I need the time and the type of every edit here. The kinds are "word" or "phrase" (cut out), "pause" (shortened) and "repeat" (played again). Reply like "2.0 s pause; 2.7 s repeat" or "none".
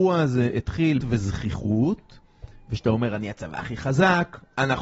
1.0 s phrase